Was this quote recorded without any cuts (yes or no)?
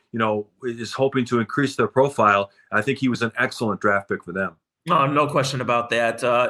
yes